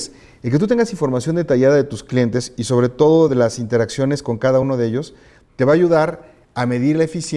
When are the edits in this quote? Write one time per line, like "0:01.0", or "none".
none